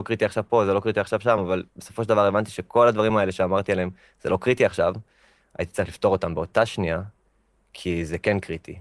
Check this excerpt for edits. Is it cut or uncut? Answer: uncut